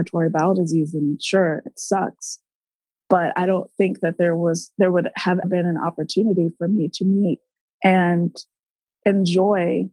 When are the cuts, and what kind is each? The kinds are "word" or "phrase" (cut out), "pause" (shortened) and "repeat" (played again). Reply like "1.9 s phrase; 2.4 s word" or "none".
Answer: 1.7 s word; 5.4 s word